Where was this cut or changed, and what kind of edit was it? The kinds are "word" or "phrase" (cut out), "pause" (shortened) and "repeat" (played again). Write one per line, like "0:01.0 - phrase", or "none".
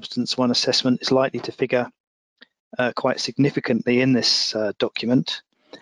none